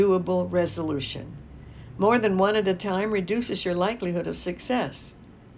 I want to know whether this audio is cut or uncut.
uncut